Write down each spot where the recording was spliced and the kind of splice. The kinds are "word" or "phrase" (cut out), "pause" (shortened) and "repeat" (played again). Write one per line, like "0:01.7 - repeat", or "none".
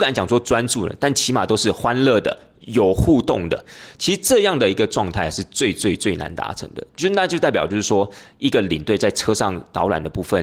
none